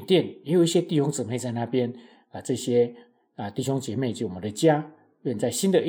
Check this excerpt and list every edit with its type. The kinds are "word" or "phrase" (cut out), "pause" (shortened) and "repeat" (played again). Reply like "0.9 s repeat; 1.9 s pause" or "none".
none